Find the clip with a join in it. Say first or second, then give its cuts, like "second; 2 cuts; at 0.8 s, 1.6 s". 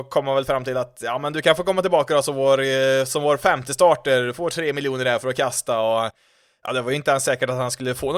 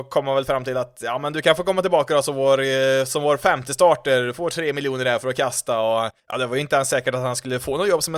second; 1 cut; at 6.2 s